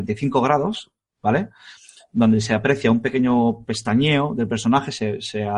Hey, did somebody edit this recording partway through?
no; 0 cuts

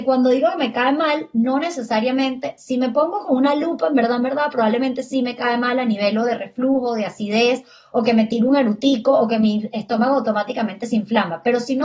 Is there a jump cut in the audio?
no; 0 cuts

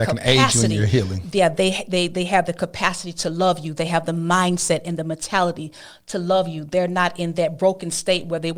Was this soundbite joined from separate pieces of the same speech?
no; 0 cuts

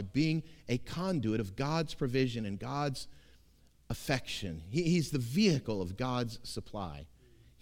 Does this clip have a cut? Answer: no; 0 cuts

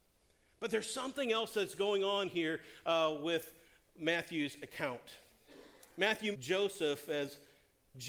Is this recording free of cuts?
no; 1 cut; at 6.3 s

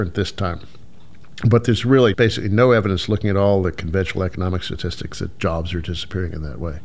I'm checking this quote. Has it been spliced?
yes; 1 cut; at 2.1 s

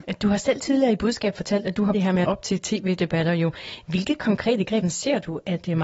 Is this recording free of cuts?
no; 3 cuts; at 1.9 s, 2.2 s, 4.8 s

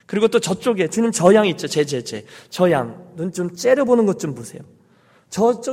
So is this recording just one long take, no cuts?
yes; 0 cuts

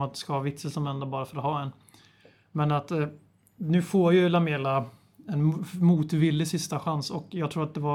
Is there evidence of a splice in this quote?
no; 0 cuts

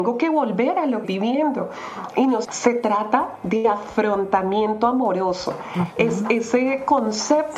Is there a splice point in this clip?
yes; 2 cuts; at 1.0 s, 2.4 s

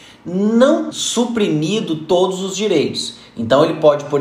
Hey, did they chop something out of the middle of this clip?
yes; 1 cut; at 0.9 s

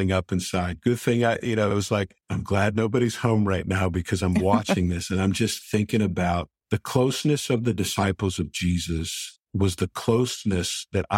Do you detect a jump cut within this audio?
yes; 3 cuts; at 2.2 s, 6.6 s, 9.4 s

